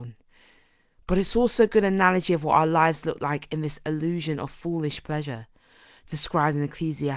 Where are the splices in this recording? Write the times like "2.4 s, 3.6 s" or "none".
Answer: none